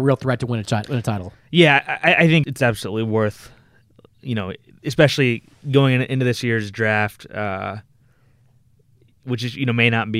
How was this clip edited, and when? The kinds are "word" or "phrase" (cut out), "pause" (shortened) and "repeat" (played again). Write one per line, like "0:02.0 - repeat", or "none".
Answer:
0:02.4 - word